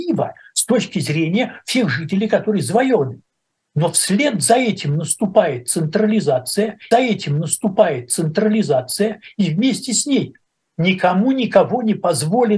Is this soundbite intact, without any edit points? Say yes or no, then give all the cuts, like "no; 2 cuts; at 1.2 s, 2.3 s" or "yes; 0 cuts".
no; 1 cut; at 6.9 s